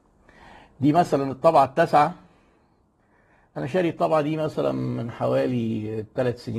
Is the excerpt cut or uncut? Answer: uncut